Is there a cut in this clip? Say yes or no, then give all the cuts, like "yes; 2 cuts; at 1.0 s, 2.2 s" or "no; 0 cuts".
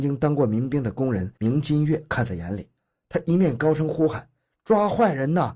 no; 0 cuts